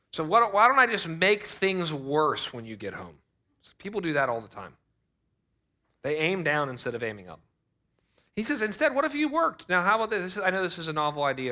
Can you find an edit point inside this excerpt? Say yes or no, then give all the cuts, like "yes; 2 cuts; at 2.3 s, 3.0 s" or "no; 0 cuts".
no; 0 cuts